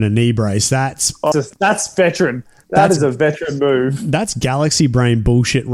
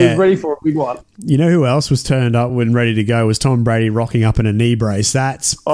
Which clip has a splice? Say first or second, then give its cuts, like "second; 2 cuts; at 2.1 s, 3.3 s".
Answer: first; 1 cut; at 1.3 s